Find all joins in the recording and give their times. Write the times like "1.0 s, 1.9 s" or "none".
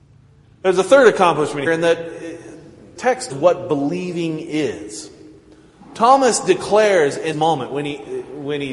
1.7 s, 3.0 s, 3.3 s, 7.3 s